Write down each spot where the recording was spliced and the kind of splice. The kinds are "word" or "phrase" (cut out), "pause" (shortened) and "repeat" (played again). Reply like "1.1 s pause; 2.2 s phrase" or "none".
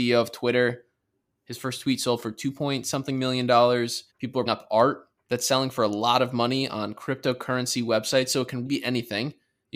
4.1 s pause; 4.5 s word; 5.2 s pause; 8.7 s word